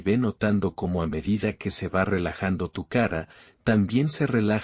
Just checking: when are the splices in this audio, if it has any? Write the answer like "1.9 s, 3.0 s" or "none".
none